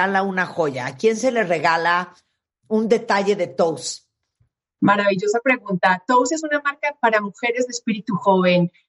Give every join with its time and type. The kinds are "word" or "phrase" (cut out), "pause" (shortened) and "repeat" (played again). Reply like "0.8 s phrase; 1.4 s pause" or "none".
none